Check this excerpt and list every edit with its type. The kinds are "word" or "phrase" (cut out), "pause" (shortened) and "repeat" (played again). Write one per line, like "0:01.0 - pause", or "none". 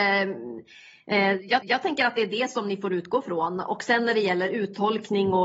0:01.6 - repeat

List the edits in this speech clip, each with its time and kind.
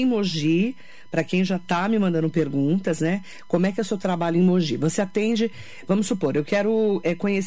none

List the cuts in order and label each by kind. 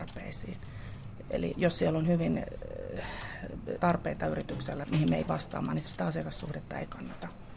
0:01.5 - word
0:03.8 - word
0:04.8 - word
0:05.3 - word
0:05.9 - word

